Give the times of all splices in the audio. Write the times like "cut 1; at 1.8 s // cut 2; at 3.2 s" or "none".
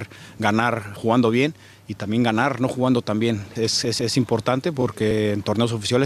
cut 1; at 1.0 s // cut 2; at 3.6 s // cut 3; at 4.0 s